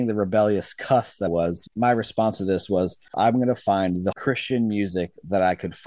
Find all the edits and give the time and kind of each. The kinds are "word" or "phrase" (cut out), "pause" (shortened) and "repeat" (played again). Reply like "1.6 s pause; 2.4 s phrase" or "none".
1.3 s word; 1.7 s word; 4.1 s word